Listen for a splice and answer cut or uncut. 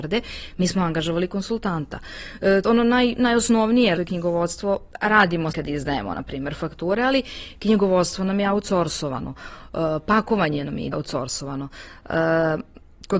cut